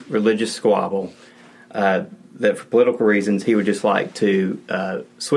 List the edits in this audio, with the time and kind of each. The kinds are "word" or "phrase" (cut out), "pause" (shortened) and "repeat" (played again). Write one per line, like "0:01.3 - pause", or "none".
0:02.2 - pause